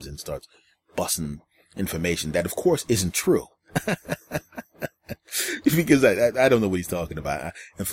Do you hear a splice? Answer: no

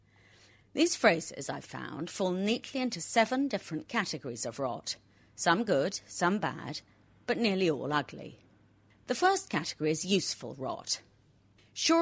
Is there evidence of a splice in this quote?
no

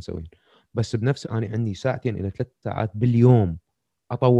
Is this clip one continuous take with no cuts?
no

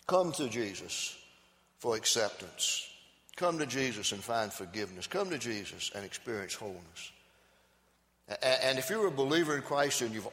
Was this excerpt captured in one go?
yes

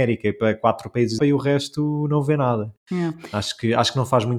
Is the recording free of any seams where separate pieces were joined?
no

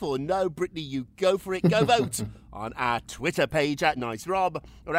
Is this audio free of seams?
no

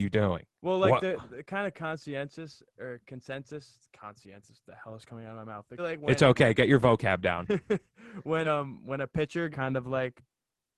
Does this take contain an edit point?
yes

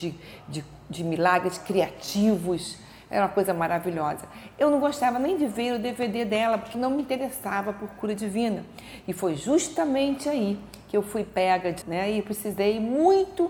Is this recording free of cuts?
no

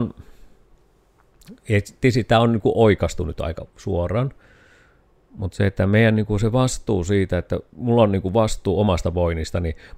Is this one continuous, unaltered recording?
yes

